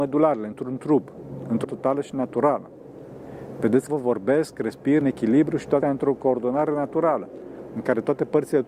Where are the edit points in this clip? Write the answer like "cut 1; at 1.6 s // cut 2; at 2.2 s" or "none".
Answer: cut 1; at 1.6 s // cut 2; at 3.9 s // cut 3; at 5.0 s // cut 4; at 5.8 s